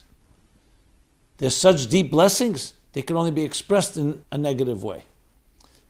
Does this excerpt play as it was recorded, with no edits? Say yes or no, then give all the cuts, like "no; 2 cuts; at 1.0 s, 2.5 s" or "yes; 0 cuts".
no; 1 cut; at 4.2 s